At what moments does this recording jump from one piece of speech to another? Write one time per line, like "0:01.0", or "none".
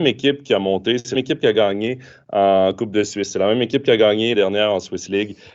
0:01.2
0:04.3